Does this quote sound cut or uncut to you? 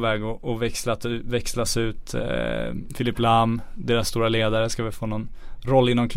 uncut